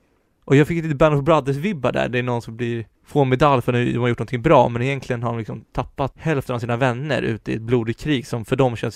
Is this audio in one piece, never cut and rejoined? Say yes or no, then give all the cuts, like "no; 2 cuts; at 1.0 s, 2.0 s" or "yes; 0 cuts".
no; 1 cut; at 3.0 s